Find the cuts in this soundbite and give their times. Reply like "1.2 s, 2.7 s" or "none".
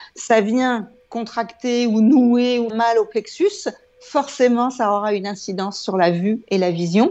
2.7 s